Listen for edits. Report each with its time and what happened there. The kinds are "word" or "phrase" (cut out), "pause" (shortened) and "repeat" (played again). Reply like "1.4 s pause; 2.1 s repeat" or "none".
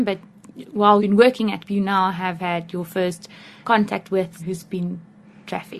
1.0 s word; 1.6 s word; 3.6 s word; 4.4 s word